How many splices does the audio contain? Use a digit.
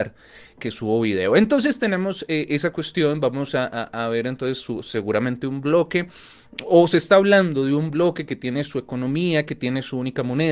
0